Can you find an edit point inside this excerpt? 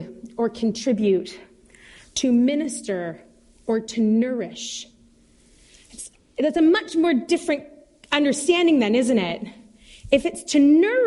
no; 0 cuts

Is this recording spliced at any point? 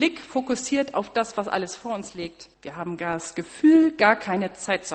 yes; 1 cut; at 2.5 s

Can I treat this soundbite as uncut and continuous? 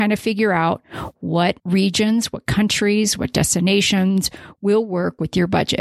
no; 1 cut; at 1.6 s

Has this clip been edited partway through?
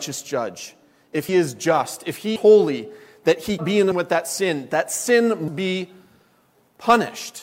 yes; 5 cuts; at 1.3 s, 2.4 s, 3.6 s, 3.9 s, 5.5 s

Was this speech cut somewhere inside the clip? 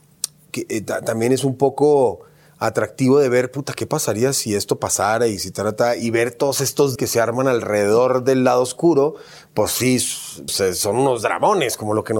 yes; 2 cuts; at 7.0 s, 10.5 s

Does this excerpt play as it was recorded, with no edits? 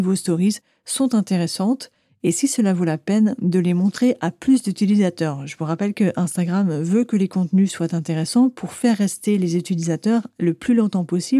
yes; 0 cuts

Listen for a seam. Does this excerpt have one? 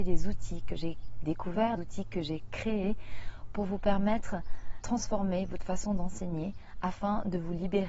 yes; 2 cuts; at 1.8 s, 4.8 s

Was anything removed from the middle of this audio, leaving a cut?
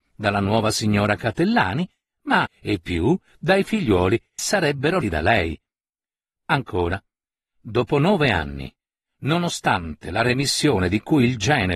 yes; 3 cuts; at 2.5 s, 4.4 s, 5.0 s

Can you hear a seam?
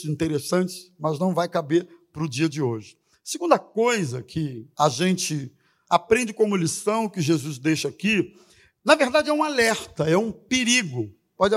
yes; 1 cut; at 4.7 s

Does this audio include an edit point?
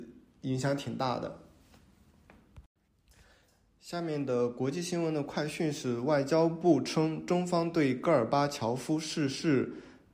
no; 0 cuts

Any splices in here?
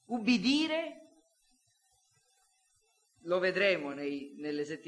no; 0 cuts

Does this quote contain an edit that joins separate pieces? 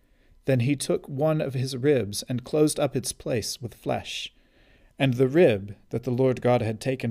no; 0 cuts

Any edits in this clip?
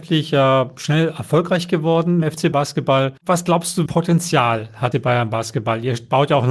yes; 5 cuts; at 2.2 s, 2.5 s, 3.2 s, 3.9 s, 4.9 s

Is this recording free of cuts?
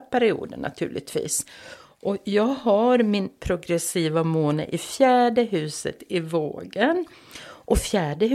yes; 0 cuts

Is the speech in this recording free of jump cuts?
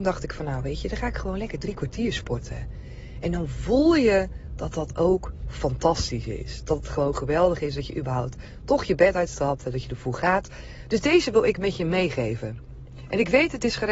yes; 0 cuts

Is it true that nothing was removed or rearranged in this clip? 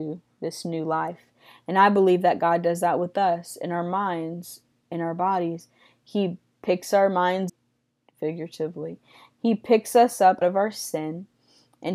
no; 2 cuts; at 7.5 s, 10.4 s

